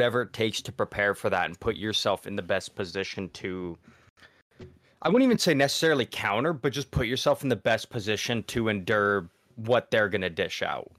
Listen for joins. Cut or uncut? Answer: uncut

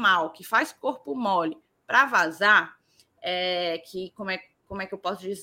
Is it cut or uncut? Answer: uncut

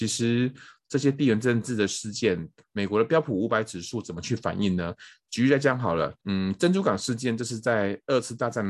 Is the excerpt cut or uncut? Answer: cut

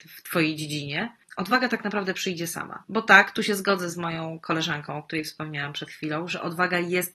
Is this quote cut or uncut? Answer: uncut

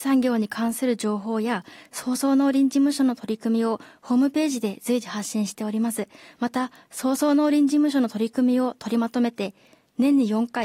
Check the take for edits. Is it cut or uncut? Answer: cut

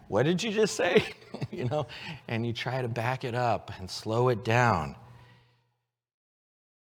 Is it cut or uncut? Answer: uncut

